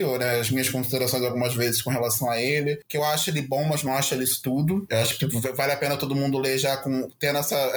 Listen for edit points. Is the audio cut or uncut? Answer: uncut